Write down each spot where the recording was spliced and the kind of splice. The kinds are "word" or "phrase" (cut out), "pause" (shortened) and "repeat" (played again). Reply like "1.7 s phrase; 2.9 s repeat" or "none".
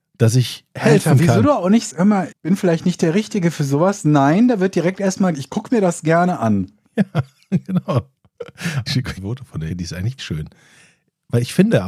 1.9 s word; 2.3 s word; 5.3 s word; 8.9 s word; 9.2 s word; 9.7 s word; 10.2 s word